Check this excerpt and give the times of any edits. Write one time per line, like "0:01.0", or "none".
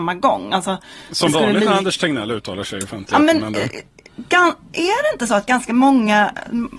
none